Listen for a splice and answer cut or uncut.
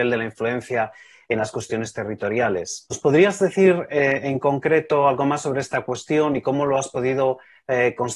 uncut